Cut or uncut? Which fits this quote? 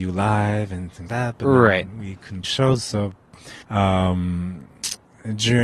cut